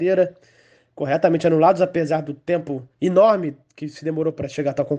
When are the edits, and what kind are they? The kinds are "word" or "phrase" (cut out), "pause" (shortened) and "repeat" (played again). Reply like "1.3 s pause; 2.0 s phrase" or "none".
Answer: 2.9 s pause

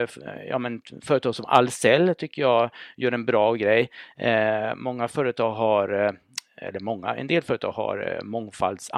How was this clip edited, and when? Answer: none

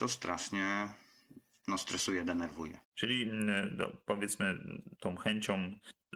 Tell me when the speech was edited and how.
2.8 s pause; 5.0 s word

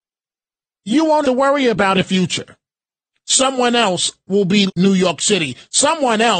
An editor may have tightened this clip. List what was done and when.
1.2 s word; 1.9 s phrase; 3.0 s pause; 4.7 s word

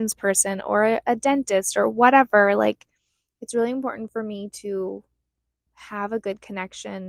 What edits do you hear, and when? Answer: none

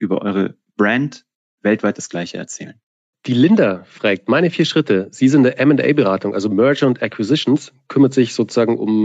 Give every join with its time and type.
none

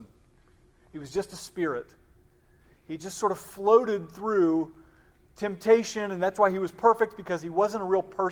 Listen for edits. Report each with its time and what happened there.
none

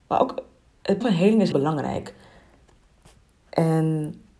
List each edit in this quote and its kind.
1.0 s word; 1.5 s word

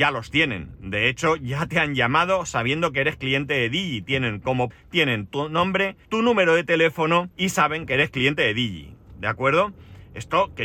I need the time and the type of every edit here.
4.7 s word; 5.3 s word; 6.0 s pause; 7.3 s pause

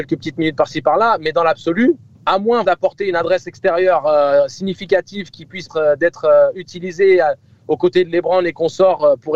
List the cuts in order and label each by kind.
2.1 s pause; 2.6 s word; 5.7 s word

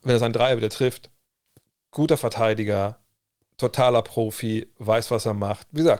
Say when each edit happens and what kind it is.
none

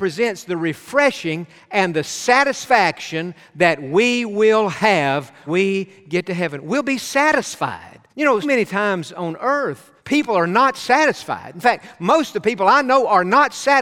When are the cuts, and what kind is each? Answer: 5.5 s word; 8.1 s pause; 8.4 s word; 10.0 s pause

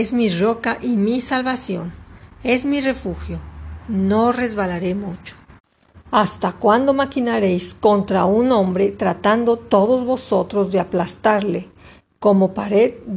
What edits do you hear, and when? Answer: none

